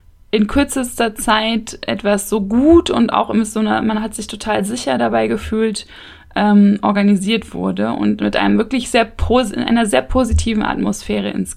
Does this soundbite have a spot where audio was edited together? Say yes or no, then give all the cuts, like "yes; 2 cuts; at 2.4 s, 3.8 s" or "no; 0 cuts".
no; 0 cuts